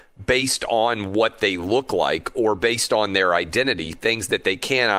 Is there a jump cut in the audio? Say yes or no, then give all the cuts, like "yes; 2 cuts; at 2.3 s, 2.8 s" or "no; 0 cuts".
no; 0 cuts